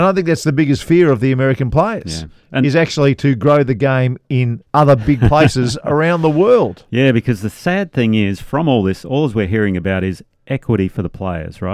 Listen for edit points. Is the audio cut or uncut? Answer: cut